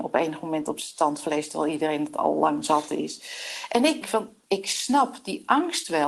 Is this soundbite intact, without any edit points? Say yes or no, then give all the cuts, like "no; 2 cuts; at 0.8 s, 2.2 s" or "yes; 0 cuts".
no; 2 cuts; at 4.0 s, 4.5 s